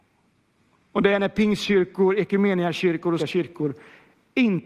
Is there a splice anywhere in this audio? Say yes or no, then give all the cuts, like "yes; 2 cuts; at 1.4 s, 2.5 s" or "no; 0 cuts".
yes; 1 cut; at 3.2 s